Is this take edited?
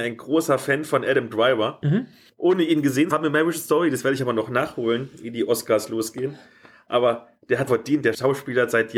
yes; 2 cuts; at 3.1 s, 7.7 s

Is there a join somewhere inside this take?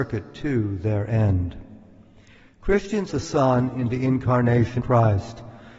yes; 3 cuts; at 3.1 s, 3.9 s, 4.8 s

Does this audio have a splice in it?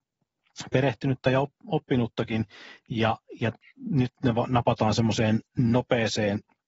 no; 0 cuts

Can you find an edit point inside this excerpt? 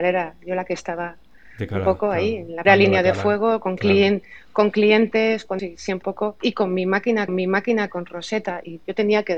yes; 4 cuts; at 2.6 s, 5.6 s, 6.0 s, 7.3 s

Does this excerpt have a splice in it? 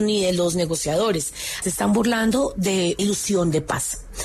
yes; 2 cuts; at 1.6 s, 3.0 s

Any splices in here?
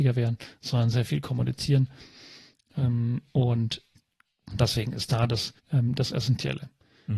yes; 2 cuts; at 0.9 s, 5.6 s

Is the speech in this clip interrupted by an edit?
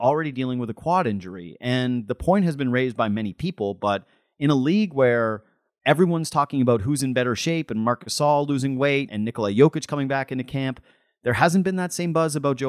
yes; 1 cut; at 9.1 s

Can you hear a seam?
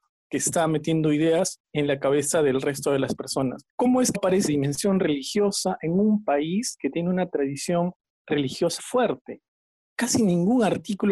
yes; 5 cuts; at 1.6 s, 3.7 s, 4.1 s, 4.5 s, 8.8 s

